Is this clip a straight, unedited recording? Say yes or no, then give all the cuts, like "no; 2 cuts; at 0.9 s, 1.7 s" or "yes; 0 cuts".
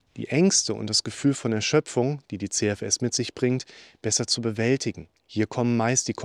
no; 1 cut; at 5.2 s